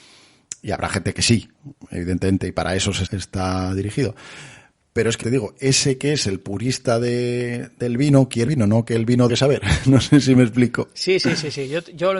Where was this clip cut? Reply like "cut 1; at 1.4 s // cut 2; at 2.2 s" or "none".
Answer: cut 1; at 3.1 s // cut 2; at 5.2 s // cut 3; at 8.5 s // cut 4; at 9.3 s